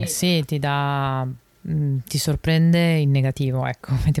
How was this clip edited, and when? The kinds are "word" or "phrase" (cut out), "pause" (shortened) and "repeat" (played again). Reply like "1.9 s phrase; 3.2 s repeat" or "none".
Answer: none